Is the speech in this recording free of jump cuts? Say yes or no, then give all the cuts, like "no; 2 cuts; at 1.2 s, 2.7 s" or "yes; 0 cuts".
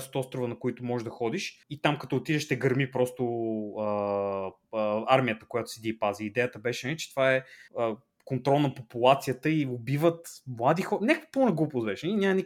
no; 2 cuts; at 1.6 s, 7.7 s